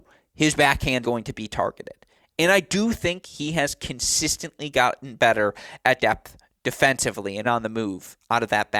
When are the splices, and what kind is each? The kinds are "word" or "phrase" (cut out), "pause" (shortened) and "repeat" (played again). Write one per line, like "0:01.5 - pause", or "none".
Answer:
0:01.0 - word
0:06.0 - word
0:07.4 - word